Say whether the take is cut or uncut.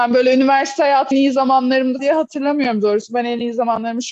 cut